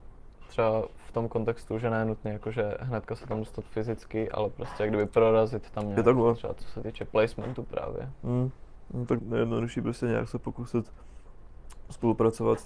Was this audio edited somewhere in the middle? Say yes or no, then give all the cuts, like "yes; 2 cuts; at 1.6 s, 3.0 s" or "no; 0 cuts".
yes; 1 cut; at 9.2 s